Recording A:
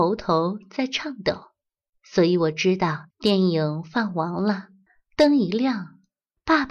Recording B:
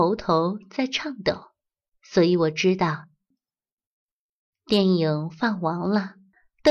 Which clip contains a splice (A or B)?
A